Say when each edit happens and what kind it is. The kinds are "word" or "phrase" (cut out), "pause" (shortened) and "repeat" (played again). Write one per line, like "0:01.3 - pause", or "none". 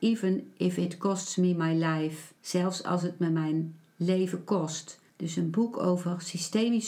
0:02.4 - pause
0:05.1 - pause